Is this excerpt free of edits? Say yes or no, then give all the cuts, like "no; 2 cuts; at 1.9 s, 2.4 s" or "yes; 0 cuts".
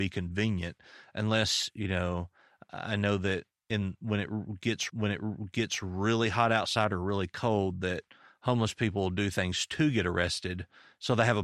no; 1 cut; at 4.9 s